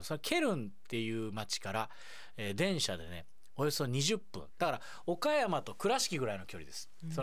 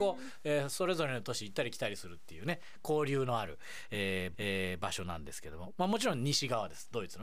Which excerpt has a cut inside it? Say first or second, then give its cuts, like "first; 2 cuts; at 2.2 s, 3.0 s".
second; 1 cut; at 4.3 s